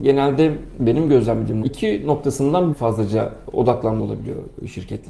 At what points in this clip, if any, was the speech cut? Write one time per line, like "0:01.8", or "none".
0:01.6
0:02.7
0:04.0

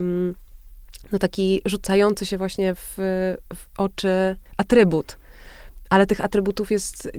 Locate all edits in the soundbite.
0:04.5

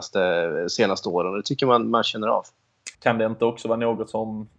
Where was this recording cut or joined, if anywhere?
0:02.9

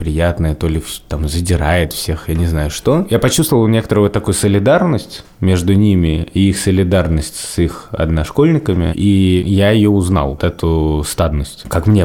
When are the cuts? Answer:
0:10.4

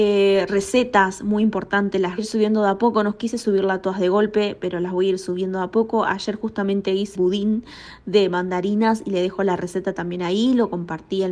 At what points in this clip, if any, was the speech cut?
0:02.2
0:07.1

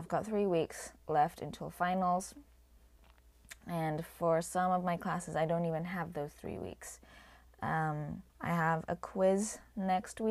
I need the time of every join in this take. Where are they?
0:08.3

